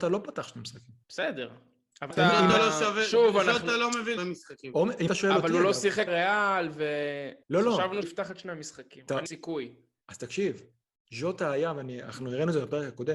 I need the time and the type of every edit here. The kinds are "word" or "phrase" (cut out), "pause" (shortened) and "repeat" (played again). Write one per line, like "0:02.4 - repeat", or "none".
0:01.0 - pause
0:02.1 - word
0:04.2 - phrase
0:05.1 - word
0:06.1 - word
0:07.4 - pause
0:08.0 - word
0:09.3 - phrase